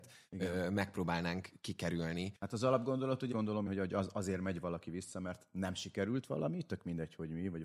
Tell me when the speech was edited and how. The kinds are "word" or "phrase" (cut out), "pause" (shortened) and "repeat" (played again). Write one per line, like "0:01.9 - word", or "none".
0:02.4 - pause
0:03.3 - phrase
0:03.7 - word